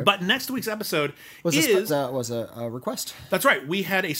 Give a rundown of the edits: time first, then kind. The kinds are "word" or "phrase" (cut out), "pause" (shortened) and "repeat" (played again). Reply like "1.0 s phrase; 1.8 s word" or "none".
1.9 s word